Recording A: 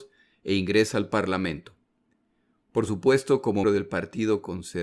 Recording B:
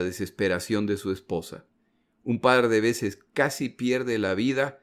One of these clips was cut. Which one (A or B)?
A